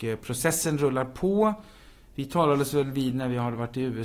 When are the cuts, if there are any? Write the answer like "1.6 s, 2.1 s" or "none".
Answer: none